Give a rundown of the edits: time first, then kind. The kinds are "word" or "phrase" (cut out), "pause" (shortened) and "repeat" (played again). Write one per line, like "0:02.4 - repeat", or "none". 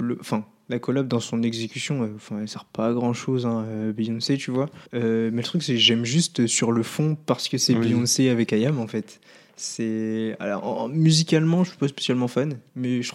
0:04.9 - pause

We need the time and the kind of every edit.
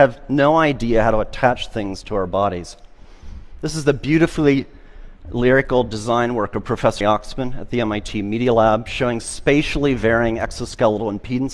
0:07.0 - word

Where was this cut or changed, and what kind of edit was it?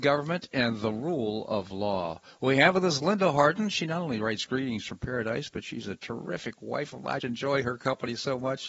0:07.2 - word

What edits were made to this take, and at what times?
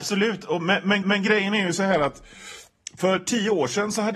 0:01.0 - repeat

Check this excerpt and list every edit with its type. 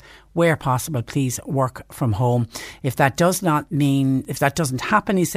none

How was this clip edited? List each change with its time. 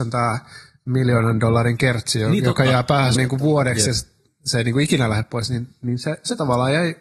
0:03.2 - phrase

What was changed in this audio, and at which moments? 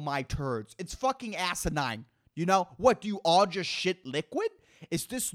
none

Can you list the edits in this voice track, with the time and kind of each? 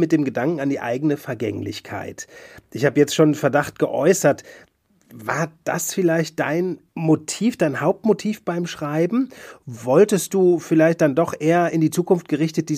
0:06.9 - pause

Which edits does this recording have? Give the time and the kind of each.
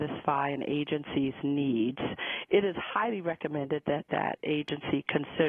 none

